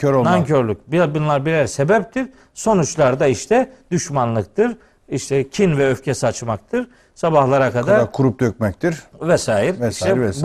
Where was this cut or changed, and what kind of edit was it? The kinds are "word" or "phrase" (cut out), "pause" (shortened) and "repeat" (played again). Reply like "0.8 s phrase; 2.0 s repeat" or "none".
none